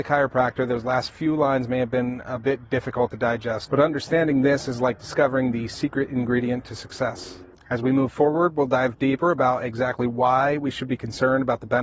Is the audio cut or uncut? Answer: uncut